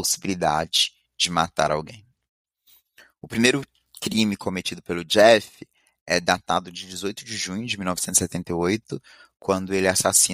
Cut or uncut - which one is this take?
uncut